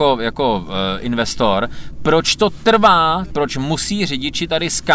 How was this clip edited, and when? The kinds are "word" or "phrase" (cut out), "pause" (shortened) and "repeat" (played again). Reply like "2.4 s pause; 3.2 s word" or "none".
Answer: 3.3 s phrase